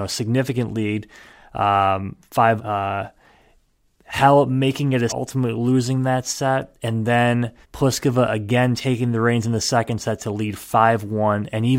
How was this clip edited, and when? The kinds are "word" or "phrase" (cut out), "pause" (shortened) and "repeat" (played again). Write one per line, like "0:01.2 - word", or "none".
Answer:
0:02.6 - word
0:05.1 - word
0:07.6 - pause